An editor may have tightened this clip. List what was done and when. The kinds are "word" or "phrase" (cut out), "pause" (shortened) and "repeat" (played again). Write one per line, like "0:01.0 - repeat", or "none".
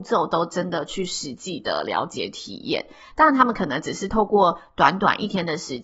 none